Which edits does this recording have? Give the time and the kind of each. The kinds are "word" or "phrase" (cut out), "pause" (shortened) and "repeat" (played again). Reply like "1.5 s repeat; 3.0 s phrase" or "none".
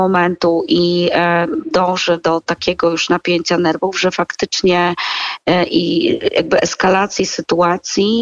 none